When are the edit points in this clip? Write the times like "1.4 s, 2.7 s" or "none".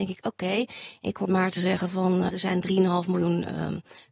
1.2 s, 2.3 s

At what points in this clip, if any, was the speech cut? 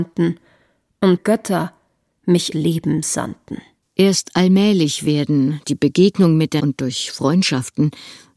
1.2 s, 2.5 s, 3.8 s, 5.6 s, 6.6 s

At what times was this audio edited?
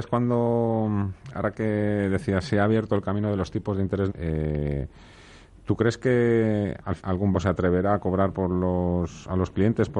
4.1 s, 7.0 s, 7.3 s

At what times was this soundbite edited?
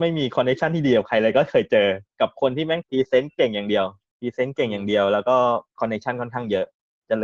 4.0 s, 5.7 s

